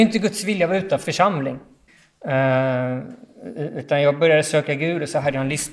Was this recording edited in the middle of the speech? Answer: yes; 2 cuts; at 1.0 s, 1.9 s

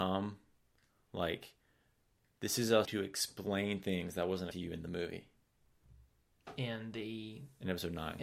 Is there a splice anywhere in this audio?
yes; 2 cuts; at 2.9 s, 4.5 s

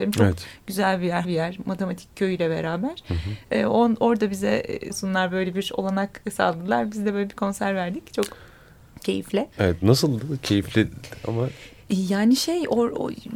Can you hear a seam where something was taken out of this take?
yes; 3 cuts; at 1.2 s, 4.9 s, 9.5 s

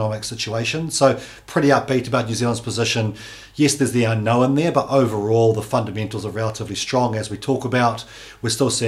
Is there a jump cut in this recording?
no; 0 cuts

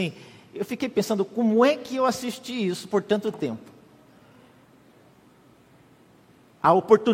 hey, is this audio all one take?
yes; 0 cuts

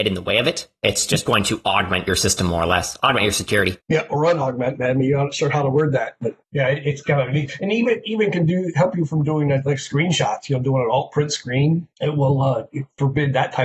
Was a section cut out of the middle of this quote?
yes; 3 cuts; at 3.8 s, 6.4 s, 11.9 s

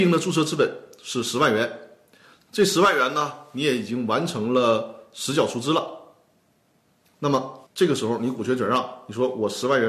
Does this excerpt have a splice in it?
yes; 1 cut; at 7.7 s

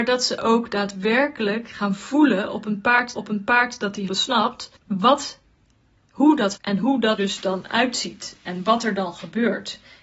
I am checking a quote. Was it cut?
yes; 5 cuts; at 3.2 s, 4.1 s, 4.8 s, 6.6 s, 7.2 s

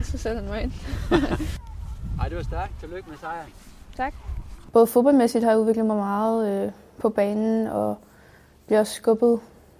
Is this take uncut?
yes; 0 cuts

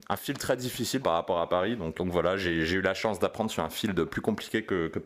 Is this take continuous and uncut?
no; 2 cuts; at 1.0 s, 2.0 s

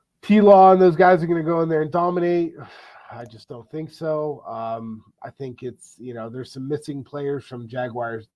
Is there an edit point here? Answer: no; 0 cuts

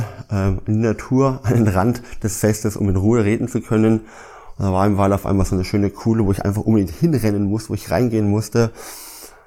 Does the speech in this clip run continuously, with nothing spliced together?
yes; 0 cuts

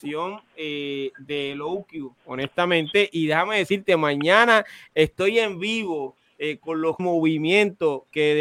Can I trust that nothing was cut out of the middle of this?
no; 2 cuts; at 2.2 s, 7.0 s

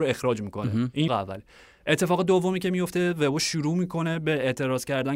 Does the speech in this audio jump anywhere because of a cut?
yes; 1 cut; at 1.1 s

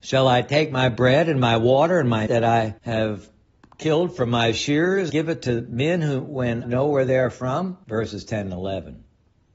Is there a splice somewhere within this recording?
yes; 5 cuts; at 2.3 s, 2.8 s, 5.1 s, 6.6 s, 7.8 s

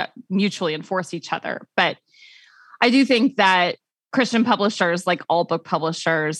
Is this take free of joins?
yes; 0 cuts

